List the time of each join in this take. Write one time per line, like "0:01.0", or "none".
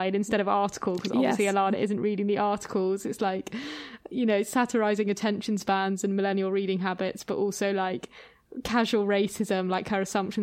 none